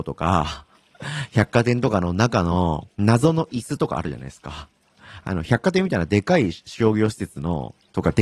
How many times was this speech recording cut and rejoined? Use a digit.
1